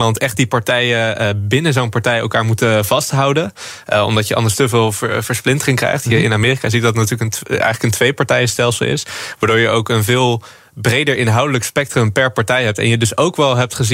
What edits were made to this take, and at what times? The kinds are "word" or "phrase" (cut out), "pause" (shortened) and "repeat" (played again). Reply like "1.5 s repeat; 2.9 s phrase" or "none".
none